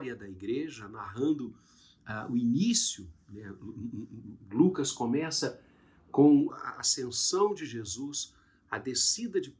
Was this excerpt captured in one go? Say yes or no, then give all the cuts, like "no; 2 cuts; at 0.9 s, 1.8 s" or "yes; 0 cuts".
yes; 0 cuts